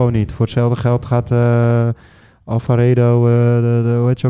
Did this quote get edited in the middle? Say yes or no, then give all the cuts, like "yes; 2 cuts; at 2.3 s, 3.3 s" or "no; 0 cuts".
no; 0 cuts